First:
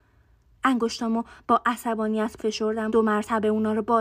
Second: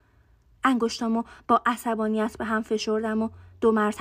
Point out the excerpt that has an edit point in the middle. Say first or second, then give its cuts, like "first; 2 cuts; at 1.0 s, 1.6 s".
first; 2 cuts; at 2.4 s, 2.9 s